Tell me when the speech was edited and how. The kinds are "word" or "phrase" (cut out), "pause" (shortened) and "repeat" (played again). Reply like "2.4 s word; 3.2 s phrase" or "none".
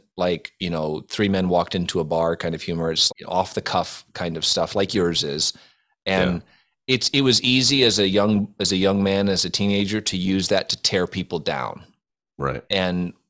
3.1 s word